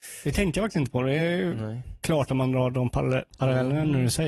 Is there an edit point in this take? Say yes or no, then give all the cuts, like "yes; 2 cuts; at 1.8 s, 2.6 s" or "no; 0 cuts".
no; 0 cuts